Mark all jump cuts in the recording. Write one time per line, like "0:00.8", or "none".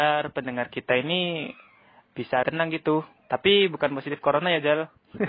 0:02.4
0:03.2